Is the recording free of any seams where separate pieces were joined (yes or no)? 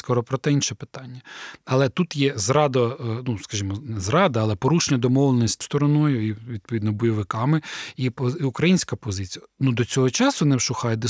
no